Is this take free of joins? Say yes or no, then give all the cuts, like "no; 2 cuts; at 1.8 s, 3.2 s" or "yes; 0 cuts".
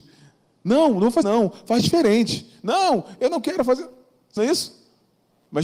no; 2 cuts; at 1.2 s, 4.4 s